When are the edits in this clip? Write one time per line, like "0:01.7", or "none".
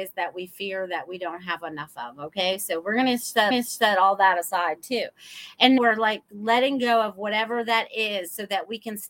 0:03.5
0:05.8